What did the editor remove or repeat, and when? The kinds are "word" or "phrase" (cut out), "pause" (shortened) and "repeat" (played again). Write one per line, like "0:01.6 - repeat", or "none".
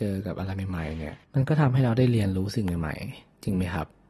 0:01.2 - pause